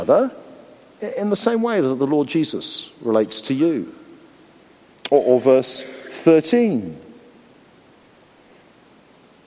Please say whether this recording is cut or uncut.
uncut